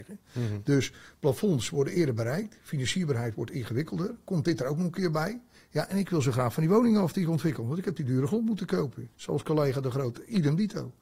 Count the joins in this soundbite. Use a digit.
2